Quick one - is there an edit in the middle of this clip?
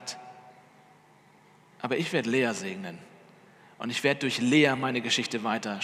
no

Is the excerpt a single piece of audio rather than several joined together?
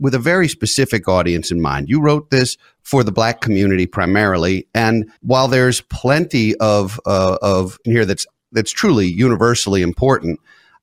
no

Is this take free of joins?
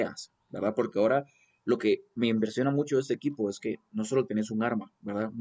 yes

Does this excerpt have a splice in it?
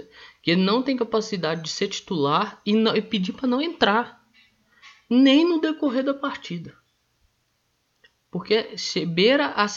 no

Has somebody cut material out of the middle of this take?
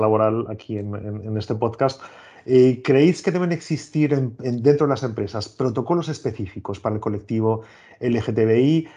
no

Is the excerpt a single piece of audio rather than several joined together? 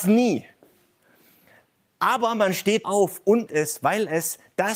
no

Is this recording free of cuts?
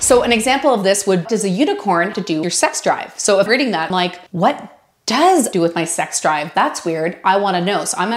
no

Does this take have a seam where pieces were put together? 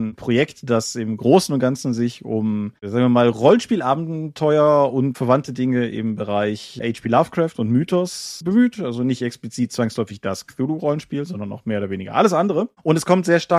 no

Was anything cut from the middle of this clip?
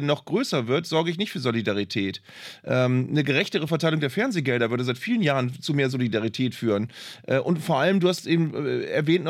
no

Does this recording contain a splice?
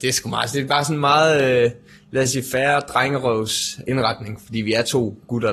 no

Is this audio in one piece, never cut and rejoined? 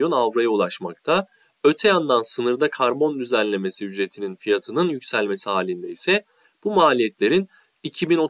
yes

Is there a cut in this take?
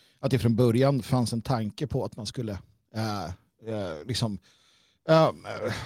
no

